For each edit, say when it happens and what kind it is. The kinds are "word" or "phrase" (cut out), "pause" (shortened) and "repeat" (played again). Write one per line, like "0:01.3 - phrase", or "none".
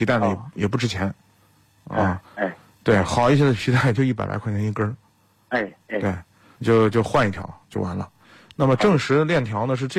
none